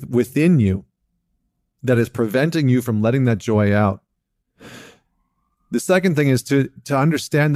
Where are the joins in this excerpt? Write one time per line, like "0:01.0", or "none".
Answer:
none